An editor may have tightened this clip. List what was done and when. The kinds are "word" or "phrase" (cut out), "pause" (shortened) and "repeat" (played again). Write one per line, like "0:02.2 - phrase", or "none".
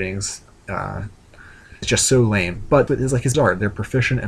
0:01.8 - word
0:02.9 - word
0:03.3 - word